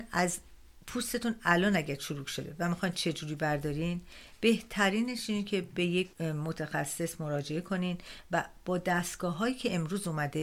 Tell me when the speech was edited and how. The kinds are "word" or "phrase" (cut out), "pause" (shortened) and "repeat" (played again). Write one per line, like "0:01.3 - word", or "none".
0:06.1 - pause

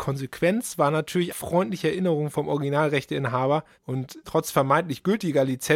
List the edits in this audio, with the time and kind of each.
0:01.3 - word
0:04.2 - word

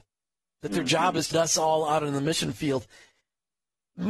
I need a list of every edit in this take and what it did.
0:01.3 - word

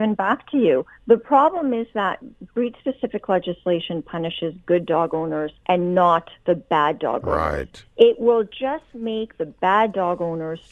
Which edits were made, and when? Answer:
0:01.0 - pause
0:05.6 - pause
0:06.4 - pause
0:07.9 - pause

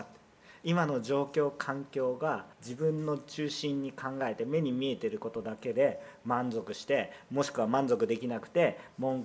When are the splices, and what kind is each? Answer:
0:02.5 - pause

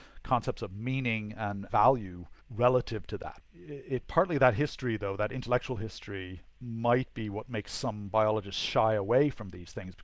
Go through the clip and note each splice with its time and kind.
0:02.4 - pause

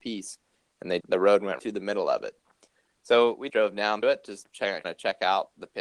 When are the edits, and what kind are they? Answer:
0:01.0 - word
0:01.6 - word
0:03.5 - word
0:04.0 - word
0:04.8 - word

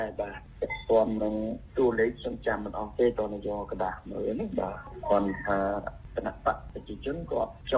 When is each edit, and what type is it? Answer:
none

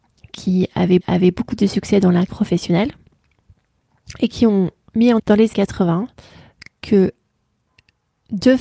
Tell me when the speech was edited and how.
0:01.0 - repeat
0:02.3 - word
0:05.2 - word
0:05.5 - word

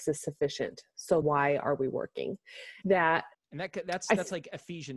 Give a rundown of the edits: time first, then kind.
0:01.2 - word
0:02.8 - phrase
0:03.3 - word

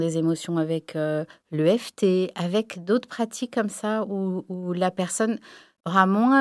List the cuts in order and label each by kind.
none

